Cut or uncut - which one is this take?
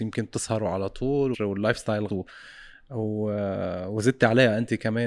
cut